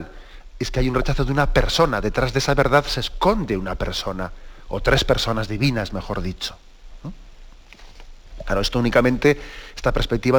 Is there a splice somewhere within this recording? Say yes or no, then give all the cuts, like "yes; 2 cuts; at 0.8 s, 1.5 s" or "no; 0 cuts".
no; 0 cuts